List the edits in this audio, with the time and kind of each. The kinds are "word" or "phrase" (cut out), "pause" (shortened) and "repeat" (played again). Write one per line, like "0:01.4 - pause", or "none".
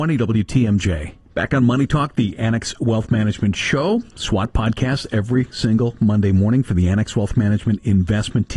0:01.2 - pause